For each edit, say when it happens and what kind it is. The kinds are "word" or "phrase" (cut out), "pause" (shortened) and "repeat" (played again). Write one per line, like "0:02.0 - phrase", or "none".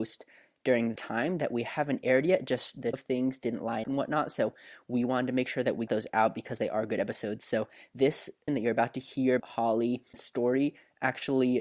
0:01.0 - word
0:02.9 - word
0:03.8 - word
0:05.9 - word
0:08.5 - word
0:09.4 - word
0:10.1 - word